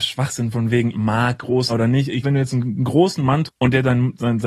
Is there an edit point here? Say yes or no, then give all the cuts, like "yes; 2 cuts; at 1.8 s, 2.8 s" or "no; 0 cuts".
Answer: yes; 4 cuts; at 0.9 s, 1.7 s, 2.2 s, 3.5 s